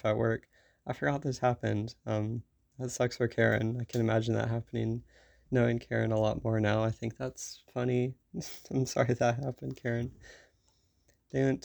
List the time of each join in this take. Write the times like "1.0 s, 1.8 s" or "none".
none